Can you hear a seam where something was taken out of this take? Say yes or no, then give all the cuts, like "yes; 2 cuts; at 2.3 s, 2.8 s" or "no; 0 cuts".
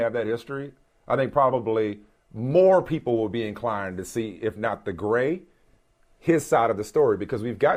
no; 0 cuts